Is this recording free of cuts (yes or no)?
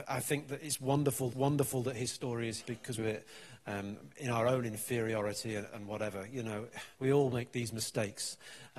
no